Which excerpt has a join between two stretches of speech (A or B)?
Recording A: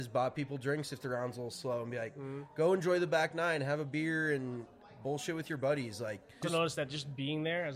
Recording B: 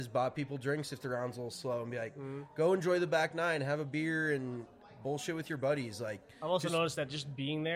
A